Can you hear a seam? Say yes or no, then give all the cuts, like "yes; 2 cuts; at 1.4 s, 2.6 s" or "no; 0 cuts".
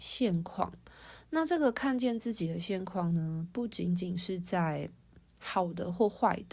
no; 0 cuts